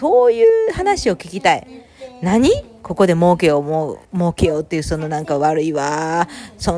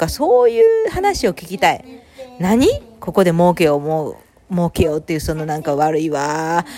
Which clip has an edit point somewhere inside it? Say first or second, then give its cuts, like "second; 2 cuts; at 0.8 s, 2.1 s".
first; 1 cut; at 4.0 s